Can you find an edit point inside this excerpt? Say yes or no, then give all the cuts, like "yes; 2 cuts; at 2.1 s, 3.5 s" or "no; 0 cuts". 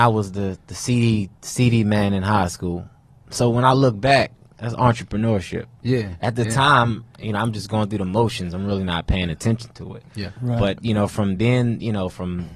no; 0 cuts